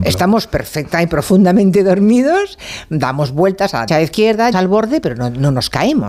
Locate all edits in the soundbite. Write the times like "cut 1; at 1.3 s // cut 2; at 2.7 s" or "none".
cut 1; at 3.9 s // cut 2; at 4.5 s